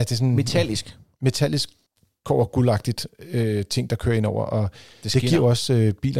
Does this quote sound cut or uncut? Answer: cut